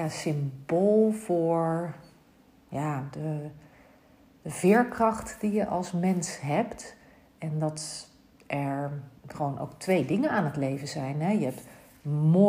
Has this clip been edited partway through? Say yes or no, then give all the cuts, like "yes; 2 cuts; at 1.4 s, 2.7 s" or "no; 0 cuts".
yes; 1 cut; at 9.2 s